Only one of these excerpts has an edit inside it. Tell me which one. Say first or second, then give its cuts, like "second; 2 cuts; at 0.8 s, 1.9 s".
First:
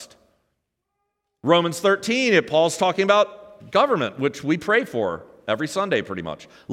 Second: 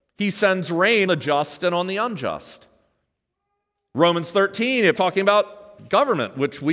second; 2 cuts; at 1.1 s, 5.0 s